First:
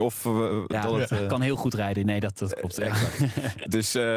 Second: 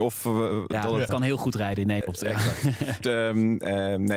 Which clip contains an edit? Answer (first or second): second